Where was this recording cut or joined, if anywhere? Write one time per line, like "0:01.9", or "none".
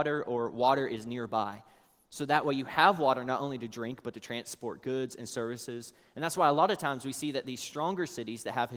none